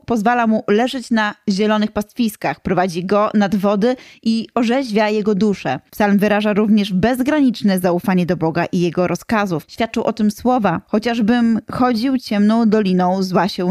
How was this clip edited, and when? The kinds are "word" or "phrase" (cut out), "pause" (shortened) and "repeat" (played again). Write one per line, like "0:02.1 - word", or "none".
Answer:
none